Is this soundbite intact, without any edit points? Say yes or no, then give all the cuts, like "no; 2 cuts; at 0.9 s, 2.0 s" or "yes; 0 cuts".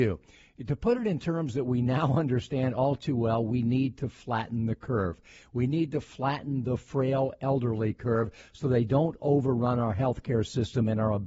yes; 0 cuts